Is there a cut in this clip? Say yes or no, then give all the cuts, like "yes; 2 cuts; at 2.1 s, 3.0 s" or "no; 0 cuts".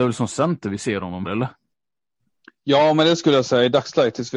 yes; 1 cut; at 1.2 s